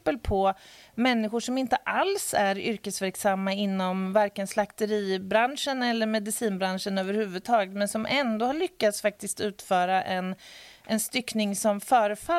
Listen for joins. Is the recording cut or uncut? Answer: uncut